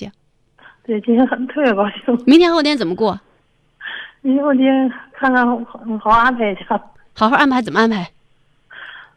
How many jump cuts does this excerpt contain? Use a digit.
0